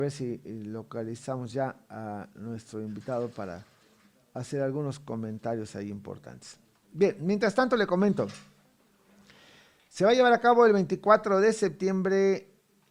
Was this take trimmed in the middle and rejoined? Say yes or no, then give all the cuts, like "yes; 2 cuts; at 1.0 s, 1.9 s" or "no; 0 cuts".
no; 0 cuts